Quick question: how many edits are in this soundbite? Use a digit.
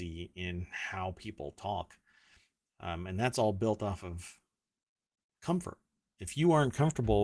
0